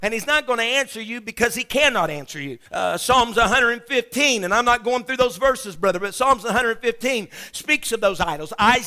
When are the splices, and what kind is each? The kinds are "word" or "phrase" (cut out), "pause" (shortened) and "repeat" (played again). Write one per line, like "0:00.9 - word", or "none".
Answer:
0:02.7 - pause